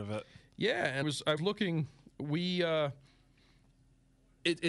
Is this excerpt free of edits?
no; 2 cuts; at 1.0 s, 1.4 s

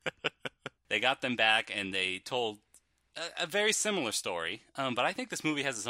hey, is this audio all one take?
yes; 0 cuts

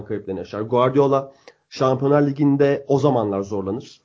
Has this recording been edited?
no; 0 cuts

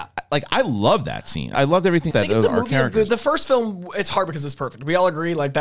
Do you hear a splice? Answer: yes; 3 cuts; at 1.5 s, 2.1 s, 3.1 s

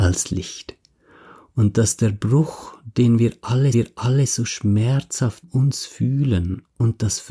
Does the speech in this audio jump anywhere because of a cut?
yes; 2 cuts; at 3.7 s, 5.4 s

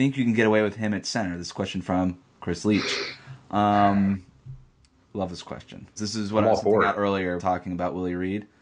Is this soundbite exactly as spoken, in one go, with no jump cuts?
no; 2 cuts; at 6.0 s, 7.4 s

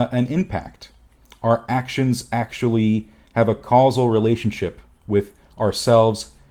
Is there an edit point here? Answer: no; 0 cuts

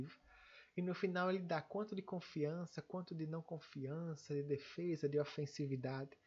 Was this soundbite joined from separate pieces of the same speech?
no; 0 cuts

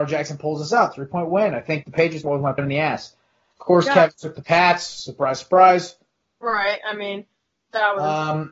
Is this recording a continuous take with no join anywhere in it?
no; 3 cuts; at 1.8 s, 2.2 s, 2.6 s

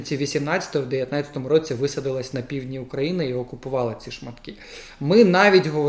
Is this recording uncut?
yes; 0 cuts

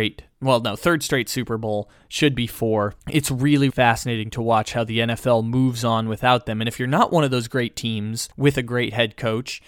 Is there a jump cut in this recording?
yes; 3 cuts; at 3.0 s, 3.7 s, 8.3 s

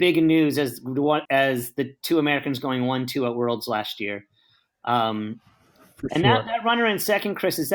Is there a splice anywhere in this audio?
yes; 1 cut; at 1.3 s

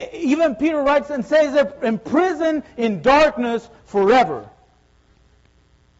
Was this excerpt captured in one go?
yes; 0 cuts

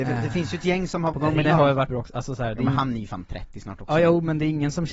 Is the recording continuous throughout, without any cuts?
no; 3 cuts; at 1.1 s, 1.4 s, 1.9 s

